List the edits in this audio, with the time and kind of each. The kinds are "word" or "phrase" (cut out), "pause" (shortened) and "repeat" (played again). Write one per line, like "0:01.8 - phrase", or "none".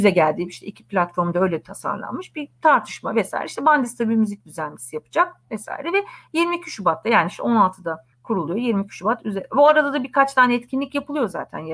0:08.1 - pause

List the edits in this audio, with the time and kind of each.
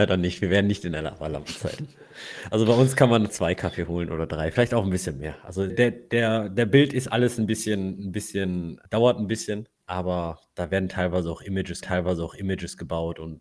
0:03.3 - word
0:05.7 - word
0:08.8 - pause
0:09.8 - word
0:11.8 - repeat

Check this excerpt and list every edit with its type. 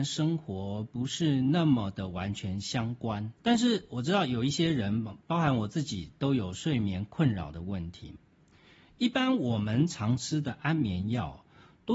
0:03.3 - pause

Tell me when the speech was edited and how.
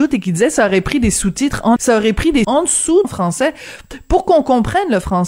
0:01.8 - word
0:02.4 - word
0:03.0 - phrase

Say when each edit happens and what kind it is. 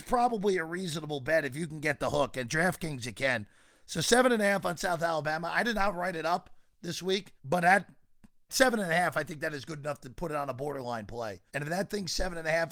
0:07.4 - pause
0:08.5 - word
0:11.5 - pause

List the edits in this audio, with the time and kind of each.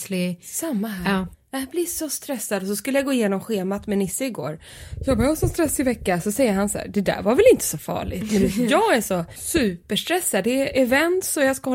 none

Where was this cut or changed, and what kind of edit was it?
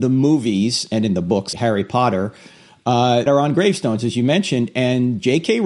0:01.5 - word
0:03.3 - word

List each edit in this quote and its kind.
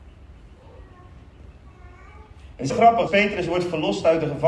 0:02.7 - word
0:03.1 - word

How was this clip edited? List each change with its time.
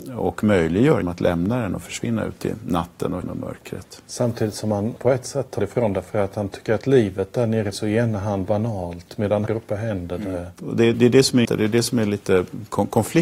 0:01.0 - word
0:03.2 - word
0:05.0 - word
0:05.6 - word
0:07.7 - word
0:08.5 - word
0:09.5 - word
0:10.9 - word
0:11.4 - word

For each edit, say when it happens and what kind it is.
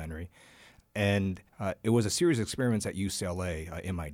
0:01.5 - pause

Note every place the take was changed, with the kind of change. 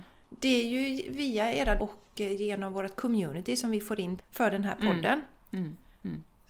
0:01.8 - word
0:04.2 - word

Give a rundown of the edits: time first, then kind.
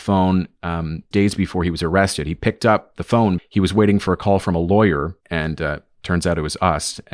0:01.1 - word
0:03.4 - word
0:05.2 - pause

